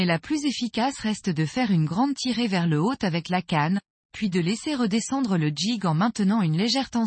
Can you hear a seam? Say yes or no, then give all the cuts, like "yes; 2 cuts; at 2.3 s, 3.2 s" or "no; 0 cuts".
no; 0 cuts